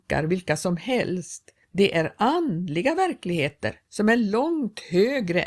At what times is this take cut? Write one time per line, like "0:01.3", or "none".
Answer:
0:01.6
0:03.8